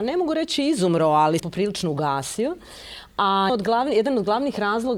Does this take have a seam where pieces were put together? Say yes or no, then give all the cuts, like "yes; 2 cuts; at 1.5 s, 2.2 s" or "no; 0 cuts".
yes; 2 cuts; at 1.4 s, 3.5 s